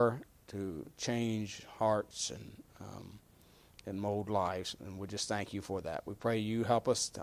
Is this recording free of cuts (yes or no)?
yes